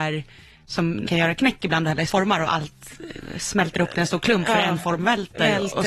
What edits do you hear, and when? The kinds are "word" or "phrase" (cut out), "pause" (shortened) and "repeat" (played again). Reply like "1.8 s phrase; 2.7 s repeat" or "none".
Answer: 1.0 s word; 2.1 s word